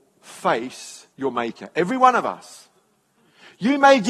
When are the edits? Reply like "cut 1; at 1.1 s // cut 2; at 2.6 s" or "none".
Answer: cut 1; at 1.1 s